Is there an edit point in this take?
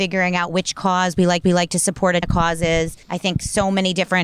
yes; 3 cuts; at 1.4 s, 2.2 s, 3.0 s

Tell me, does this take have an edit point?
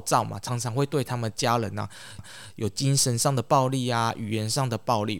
yes; 1 cut; at 2.2 s

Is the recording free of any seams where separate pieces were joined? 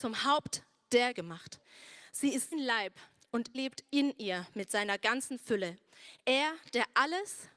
no; 3 cuts; at 1.1 s, 2.5 s, 3.5 s

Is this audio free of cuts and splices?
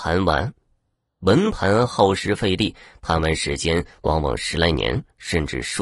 yes; 0 cuts

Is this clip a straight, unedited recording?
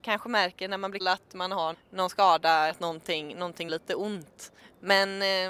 no; 5 cuts; at 1.0 s, 1.7 s, 2.7 s, 3.7 s, 4.6 s

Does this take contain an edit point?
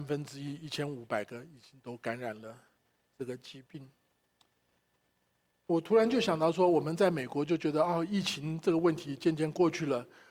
no; 0 cuts

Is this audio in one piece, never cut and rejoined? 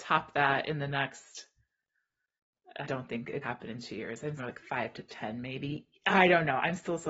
no; 3 cuts; at 2.8 s, 3.4 s, 4.4 s

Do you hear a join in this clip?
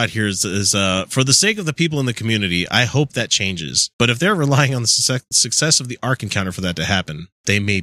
yes; 1 cut; at 3.9 s

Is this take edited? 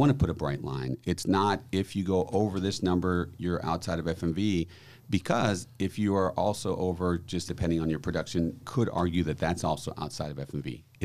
yes; 2 cuts; at 7.5 s, 8.6 s

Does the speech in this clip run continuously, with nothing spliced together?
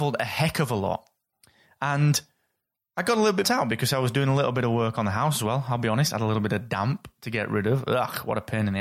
no; 1 cut; at 3.4 s

